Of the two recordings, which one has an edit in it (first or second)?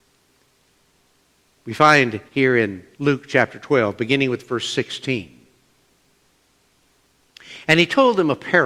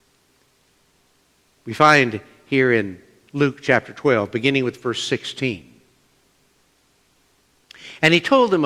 first